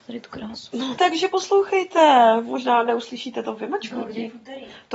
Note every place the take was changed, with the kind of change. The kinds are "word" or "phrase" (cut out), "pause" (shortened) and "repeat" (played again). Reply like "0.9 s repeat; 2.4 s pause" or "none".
1.0 s word